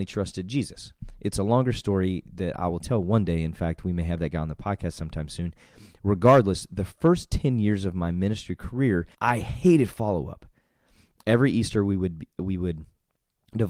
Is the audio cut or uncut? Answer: cut